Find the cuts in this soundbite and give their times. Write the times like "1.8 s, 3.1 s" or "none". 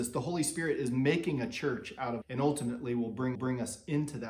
2.2 s, 3.3 s